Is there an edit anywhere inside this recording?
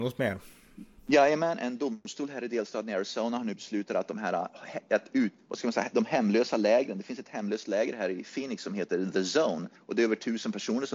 yes; 1 cut; at 9.8 s

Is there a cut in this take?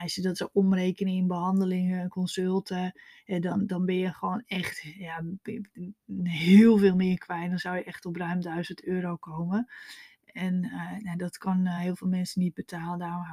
no; 0 cuts

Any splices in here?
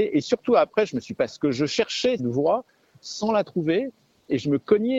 yes; 2 cuts; at 1.2 s, 2.2 s

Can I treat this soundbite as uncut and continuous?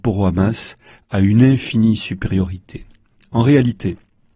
yes; 0 cuts

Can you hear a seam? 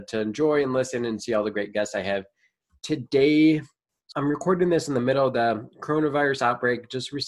yes; 1 cut; at 4.1 s

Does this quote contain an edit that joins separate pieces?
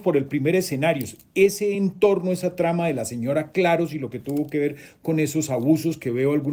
no; 0 cuts

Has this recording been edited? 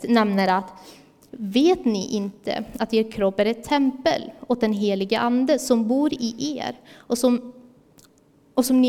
no; 0 cuts

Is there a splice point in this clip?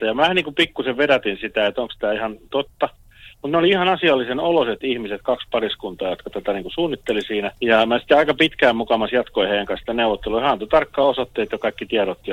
no; 0 cuts

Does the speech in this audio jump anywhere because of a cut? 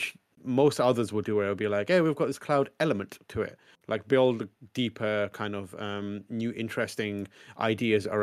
no; 0 cuts

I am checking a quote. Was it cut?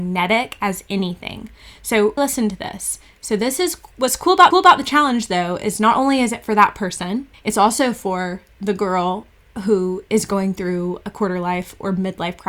yes; 3 cuts; at 2.2 s, 4.5 s, 7.3 s

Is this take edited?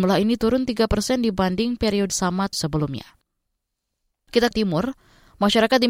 yes; 3 cuts; at 2.1 s, 2.5 s, 4.5 s

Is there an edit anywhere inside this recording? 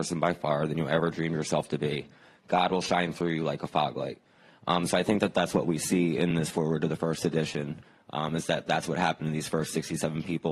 no; 0 cuts

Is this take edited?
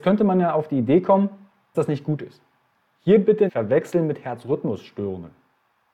yes; 2 cuts; at 1.7 s, 3.5 s

